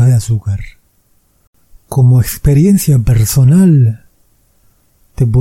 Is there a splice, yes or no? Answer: no